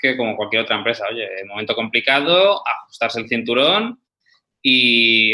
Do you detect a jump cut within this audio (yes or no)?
no